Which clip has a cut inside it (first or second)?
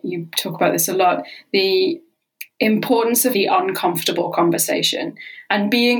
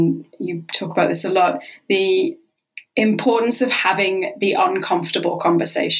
first